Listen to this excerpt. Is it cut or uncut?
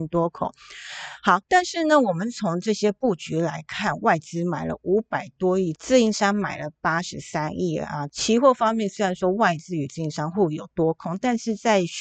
cut